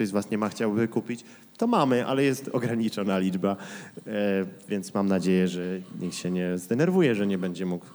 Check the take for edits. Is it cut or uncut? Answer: uncut